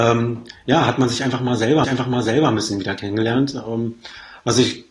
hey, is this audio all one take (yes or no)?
no